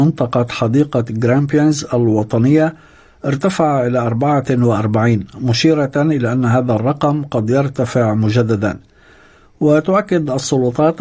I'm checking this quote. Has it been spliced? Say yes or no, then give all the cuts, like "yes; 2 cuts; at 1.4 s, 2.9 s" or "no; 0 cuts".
no; 0 cuts